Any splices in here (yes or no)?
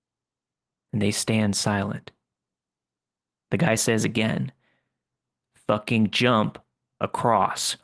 no